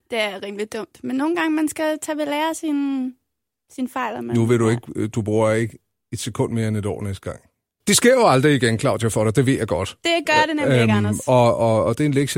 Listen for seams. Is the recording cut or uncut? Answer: uncut